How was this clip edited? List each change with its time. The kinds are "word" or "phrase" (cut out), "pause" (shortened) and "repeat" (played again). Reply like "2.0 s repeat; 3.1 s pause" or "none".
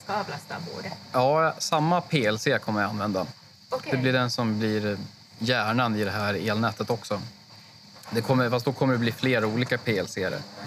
none

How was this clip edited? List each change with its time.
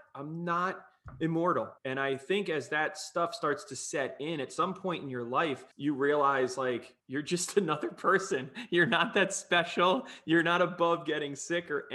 1.8 s pause; 5.7 s pause; 7.0 s pause

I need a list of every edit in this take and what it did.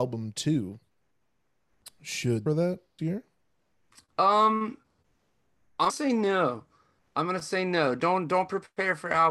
2.5 s phrase; 3.0 s word; 5.9 s word

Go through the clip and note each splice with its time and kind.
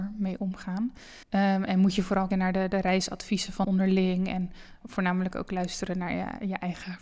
1.2 s pause; 2.3 s word; 3.6 s phrase; 4.8 s word

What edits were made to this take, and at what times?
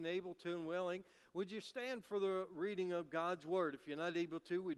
none

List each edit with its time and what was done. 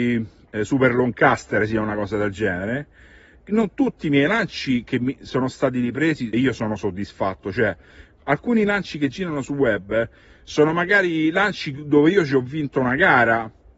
6.3 s word

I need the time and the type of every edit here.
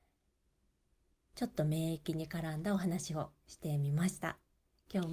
none

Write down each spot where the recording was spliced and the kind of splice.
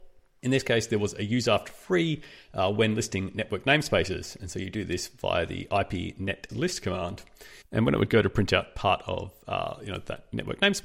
6.5 s word

